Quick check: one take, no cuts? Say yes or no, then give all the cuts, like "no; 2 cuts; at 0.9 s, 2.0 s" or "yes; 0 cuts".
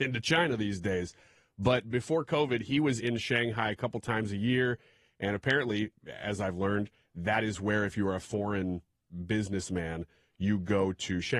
yes; 0 cuts